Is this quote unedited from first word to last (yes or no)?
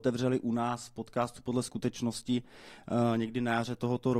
yes